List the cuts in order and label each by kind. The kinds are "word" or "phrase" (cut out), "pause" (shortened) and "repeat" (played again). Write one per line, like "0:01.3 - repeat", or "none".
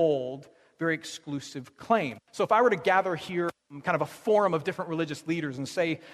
0:02.2 - pause

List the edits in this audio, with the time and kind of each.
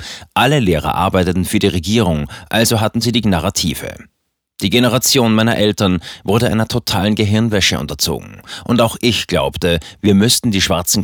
0:03.2 - word

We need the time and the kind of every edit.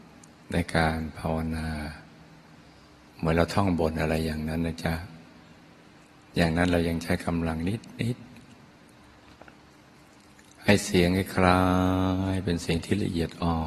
none

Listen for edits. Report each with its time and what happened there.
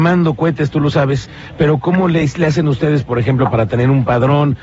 none

